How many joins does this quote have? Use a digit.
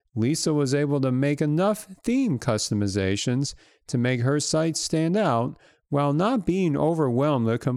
0